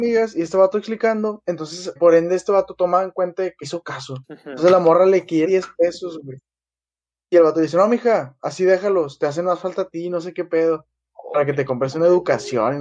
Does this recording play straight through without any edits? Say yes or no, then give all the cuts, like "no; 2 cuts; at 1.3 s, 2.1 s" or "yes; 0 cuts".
no; 4 cuts; at 2.0 s, 3.6 s, 4.2 s, 5.4 s